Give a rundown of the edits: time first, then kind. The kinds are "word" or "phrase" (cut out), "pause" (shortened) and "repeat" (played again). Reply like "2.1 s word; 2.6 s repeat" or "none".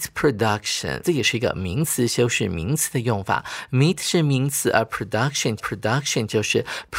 1.0 s phrase; 5.6 s repeat